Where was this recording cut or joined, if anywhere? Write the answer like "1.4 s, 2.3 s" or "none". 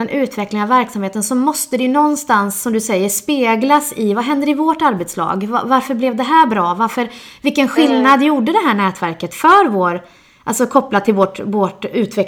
none